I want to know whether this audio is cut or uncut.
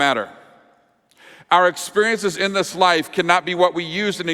uncut